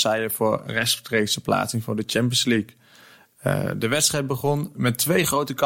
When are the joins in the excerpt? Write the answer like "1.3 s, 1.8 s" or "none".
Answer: none